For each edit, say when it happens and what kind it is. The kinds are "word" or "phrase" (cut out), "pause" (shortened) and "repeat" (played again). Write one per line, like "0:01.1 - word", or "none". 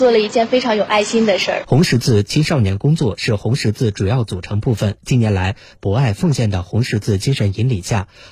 0:05.7 - phrase